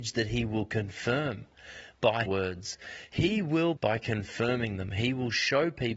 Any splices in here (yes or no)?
yes